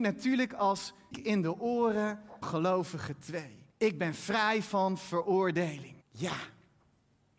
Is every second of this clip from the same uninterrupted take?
no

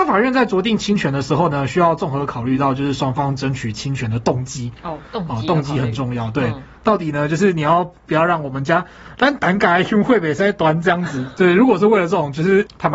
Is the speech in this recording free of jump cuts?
no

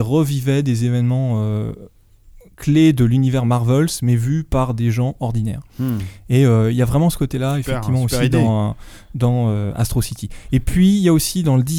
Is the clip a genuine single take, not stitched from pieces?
yes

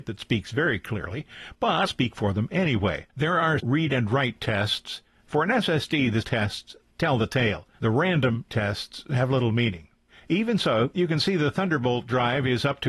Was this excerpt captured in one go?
no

